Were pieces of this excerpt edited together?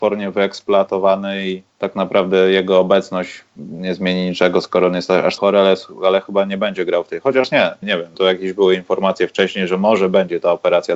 yes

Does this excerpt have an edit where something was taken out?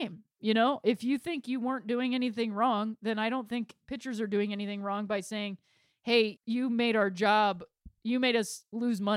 yes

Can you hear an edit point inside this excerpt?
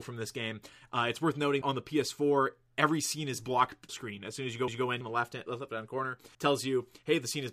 yes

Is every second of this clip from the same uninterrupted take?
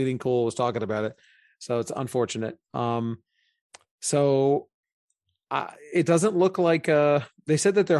yes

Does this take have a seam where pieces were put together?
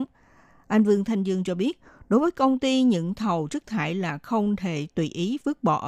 no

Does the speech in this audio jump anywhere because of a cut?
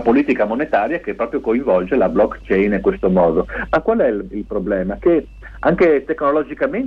no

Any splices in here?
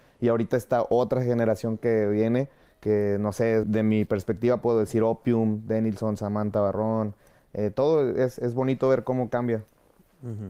yes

